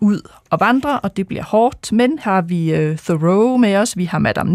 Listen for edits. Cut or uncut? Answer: cut